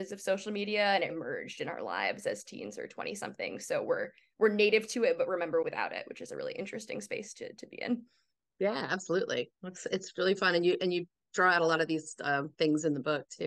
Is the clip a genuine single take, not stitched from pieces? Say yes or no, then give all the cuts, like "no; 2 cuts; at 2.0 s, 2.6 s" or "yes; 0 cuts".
no; 2 cuts; at 1.1 s, 5.6 s